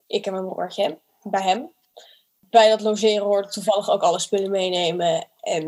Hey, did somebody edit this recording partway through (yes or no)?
no